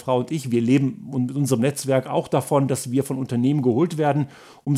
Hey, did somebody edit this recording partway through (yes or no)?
no